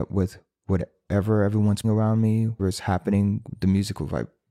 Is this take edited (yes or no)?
yes